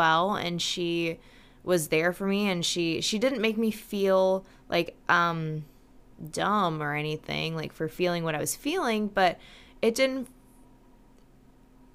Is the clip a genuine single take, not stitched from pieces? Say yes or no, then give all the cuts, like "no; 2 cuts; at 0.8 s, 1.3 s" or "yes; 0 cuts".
yes; 0 cuts